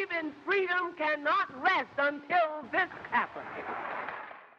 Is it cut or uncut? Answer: uncut